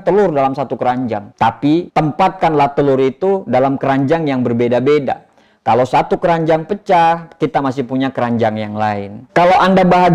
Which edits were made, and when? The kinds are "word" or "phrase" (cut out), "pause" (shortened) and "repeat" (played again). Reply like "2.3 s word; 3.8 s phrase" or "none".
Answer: 1.3 s pause